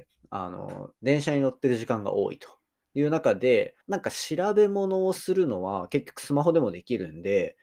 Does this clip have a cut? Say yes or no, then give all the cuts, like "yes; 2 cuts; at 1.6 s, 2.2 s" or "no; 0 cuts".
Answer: yes; 2 cuts; at 1.0 s, 3.8 s